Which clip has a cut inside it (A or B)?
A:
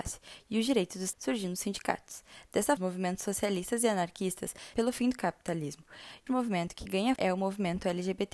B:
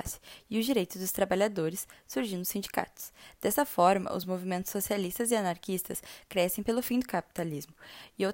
A